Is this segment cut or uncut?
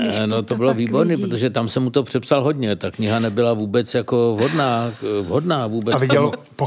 uncut